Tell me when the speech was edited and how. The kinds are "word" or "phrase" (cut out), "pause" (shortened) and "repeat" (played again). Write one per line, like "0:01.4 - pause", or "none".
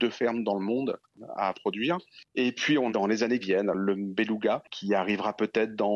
0:01.5 - word
0:02.9 - word
0:03.4 - word